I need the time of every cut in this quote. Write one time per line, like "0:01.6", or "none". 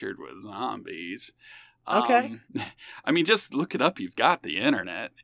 0:02.5